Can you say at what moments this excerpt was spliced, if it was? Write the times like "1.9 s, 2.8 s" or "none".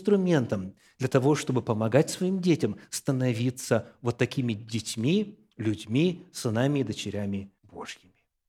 7.6 s